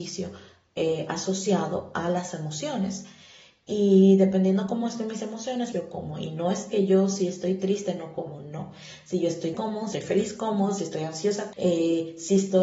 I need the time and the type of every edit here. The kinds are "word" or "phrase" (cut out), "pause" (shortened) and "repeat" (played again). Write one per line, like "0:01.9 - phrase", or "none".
0:05.7 - word
0:09.5 - word
0:09.9 - word
0:11.5 - word